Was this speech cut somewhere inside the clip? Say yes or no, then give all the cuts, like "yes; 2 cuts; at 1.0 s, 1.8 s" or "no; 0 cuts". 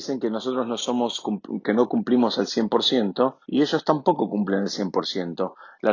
yes; 1 cut; at 3.4 s